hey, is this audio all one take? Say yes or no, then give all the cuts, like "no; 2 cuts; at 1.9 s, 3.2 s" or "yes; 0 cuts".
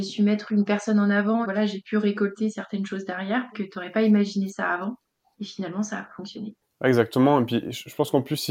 no; 4 cuts; at 1.4 s, 3.5 s, 5.2 s, 6.6 s